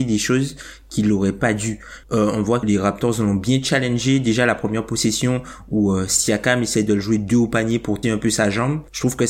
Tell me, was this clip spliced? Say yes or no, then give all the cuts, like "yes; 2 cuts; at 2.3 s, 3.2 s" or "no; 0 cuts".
yes; 2 cuts; at 2.6 s, 8.0 s